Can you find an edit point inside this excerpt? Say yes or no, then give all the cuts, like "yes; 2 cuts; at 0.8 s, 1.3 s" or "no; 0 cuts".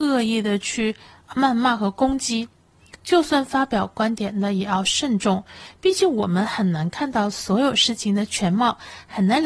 yes; 1 cut; at 1.3 s